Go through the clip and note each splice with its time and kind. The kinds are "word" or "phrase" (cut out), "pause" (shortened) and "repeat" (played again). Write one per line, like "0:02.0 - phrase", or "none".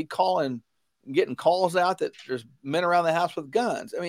none